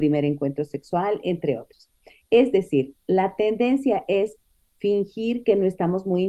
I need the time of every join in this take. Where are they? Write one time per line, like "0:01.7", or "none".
none